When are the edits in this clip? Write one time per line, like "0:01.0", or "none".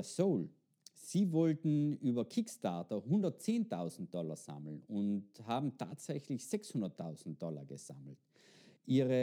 none

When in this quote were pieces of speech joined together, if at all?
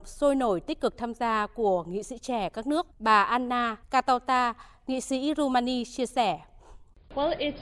0:02.9
0:03.8

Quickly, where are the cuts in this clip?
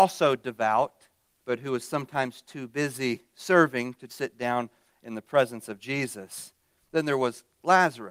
0:01.3
0:04.1

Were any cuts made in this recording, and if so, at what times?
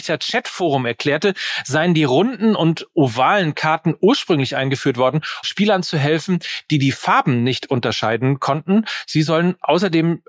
0:05.4

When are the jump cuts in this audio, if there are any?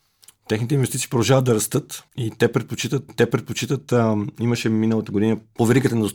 0:02.1
0:03.1

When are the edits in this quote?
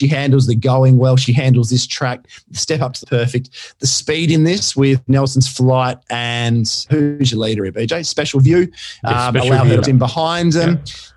0:03.0
0:06.9
0:09.8

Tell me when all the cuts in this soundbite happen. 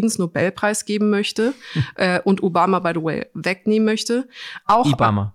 none

